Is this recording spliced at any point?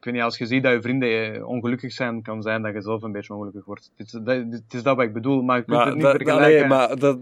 no; 0 cuts

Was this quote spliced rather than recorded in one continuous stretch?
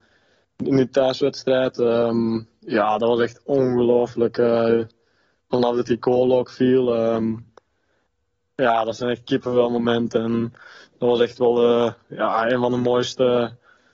no; 0 cuts

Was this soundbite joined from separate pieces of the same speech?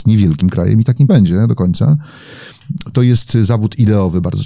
yes; 2 cuts; at 1.1 s, 2.9 s

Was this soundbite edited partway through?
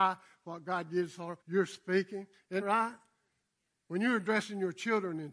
yes; 2 cuts; at 1.4 s, 2.6 s

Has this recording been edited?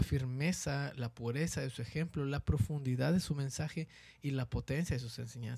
no; 0 cuts

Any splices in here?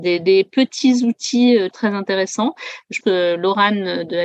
yes; 2 cuts; at 1.7 s, 3.0 s

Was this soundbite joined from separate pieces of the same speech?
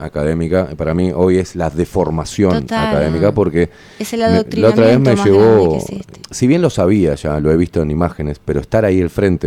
no; 0 cuts

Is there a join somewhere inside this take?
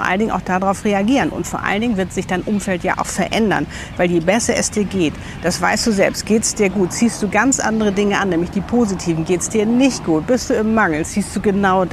no; 0 cuts

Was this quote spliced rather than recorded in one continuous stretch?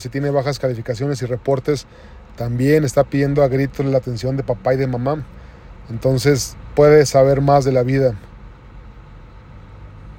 no; 0 cuts

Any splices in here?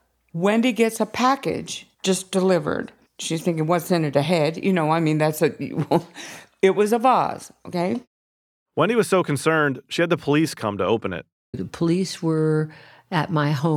yes; 2 cuts; at 1.9 s, 3.0 s

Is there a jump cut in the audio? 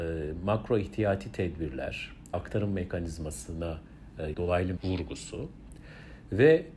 yes; 3 cuts; at 2.3 s, 4.3 s, 4.8 s

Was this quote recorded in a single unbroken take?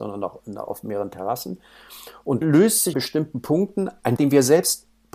no; 3 cuts; at 2.4 s, 2.9 s, 4.2 s

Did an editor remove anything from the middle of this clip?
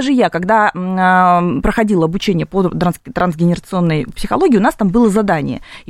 no; 0 cuts

